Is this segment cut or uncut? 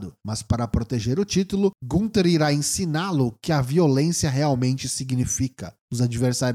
uncut